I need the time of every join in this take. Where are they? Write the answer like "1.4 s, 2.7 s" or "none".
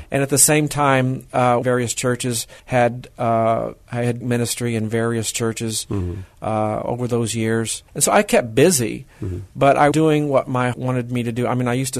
1.6 s, 2.6 s, 3.8 s, 4.2 s, 7.9 s, 9.9 s, 10.7 s